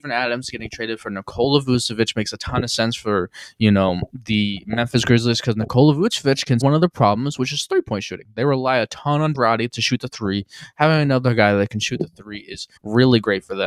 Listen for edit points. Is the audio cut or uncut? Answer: cut